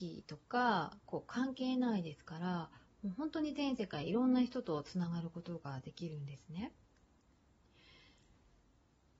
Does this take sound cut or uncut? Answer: uncut